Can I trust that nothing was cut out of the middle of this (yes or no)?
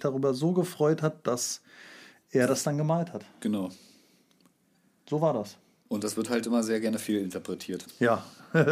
yes